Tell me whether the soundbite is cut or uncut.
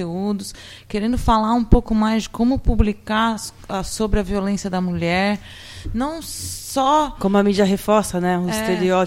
uncut